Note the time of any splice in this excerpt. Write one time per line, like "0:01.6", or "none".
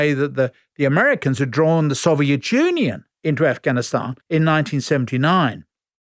0:04.2